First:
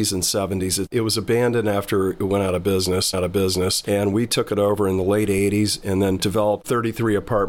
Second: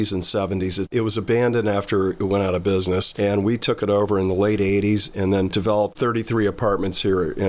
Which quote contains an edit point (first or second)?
first